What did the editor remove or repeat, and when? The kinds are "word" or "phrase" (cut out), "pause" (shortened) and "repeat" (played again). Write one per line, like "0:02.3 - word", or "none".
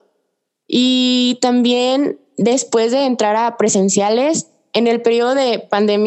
none